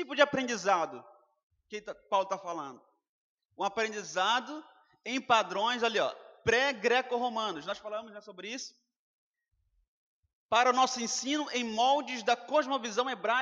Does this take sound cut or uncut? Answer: uncut